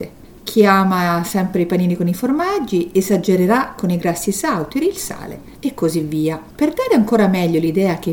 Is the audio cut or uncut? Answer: cut